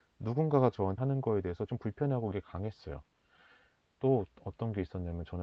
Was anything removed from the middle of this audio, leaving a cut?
yes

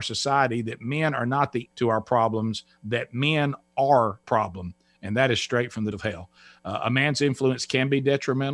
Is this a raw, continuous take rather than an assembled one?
no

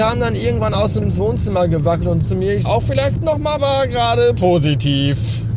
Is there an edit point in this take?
yes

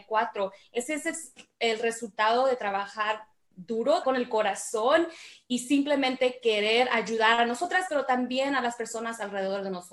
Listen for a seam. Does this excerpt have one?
yes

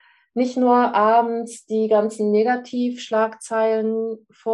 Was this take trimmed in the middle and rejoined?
no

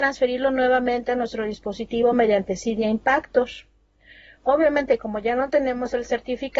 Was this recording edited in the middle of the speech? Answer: no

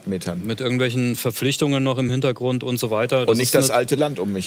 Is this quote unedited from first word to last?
yes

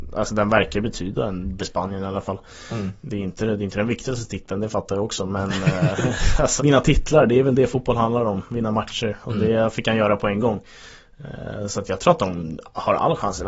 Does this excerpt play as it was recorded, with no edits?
no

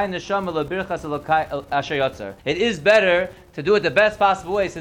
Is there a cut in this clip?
yes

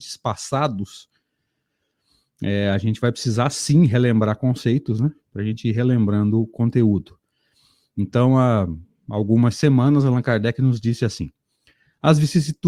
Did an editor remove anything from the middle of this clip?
no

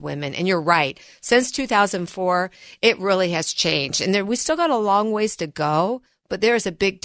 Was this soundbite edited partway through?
no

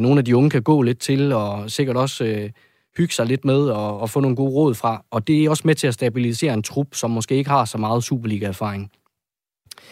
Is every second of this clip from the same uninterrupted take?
yes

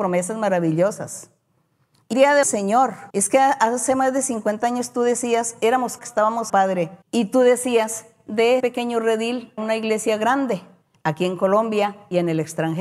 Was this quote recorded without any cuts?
no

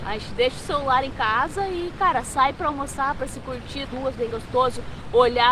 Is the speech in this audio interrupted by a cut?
yes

